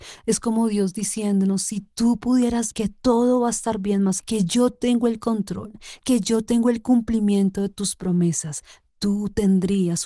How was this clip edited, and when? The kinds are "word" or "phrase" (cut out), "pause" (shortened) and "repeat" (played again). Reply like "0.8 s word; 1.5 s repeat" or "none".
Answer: 2.7 s word; 4.2 s word